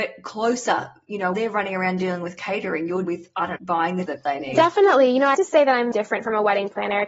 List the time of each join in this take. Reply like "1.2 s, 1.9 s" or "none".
1.3 s, 3.0 s, 3.6 s, 4.1 s, 5.3 s, 5.9 s